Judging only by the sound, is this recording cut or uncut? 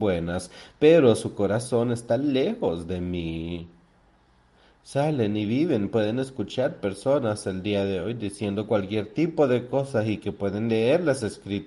uncut